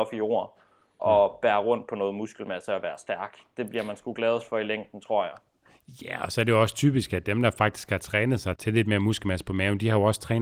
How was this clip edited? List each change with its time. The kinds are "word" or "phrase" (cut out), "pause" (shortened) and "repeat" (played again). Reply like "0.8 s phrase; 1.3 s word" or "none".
1.0 s word; 8.6 s word